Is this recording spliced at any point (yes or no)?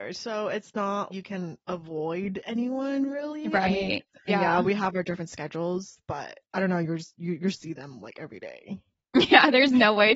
yes